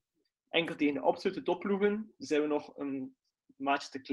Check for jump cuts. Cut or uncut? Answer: uncut